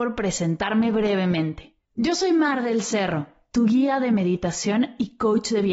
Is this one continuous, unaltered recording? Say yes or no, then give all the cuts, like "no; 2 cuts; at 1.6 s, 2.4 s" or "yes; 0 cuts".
no; 1 cut; at 1.8 s